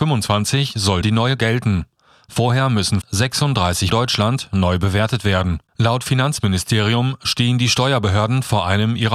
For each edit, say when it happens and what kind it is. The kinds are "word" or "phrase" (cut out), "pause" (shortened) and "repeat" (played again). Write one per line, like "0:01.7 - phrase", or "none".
0:01.0 - word
0:01.4 - word
0:03.0 - word
0:03.9 - phrase
0:05.7 - pause